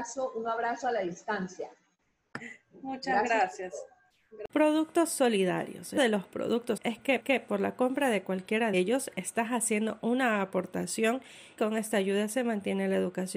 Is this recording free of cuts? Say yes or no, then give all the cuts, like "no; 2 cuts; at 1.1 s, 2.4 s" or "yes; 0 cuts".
no; 6 cuts; at 4.5 s, 6.0 s, 6.8 s, 7.2 s, 8.7 s, 11.6 s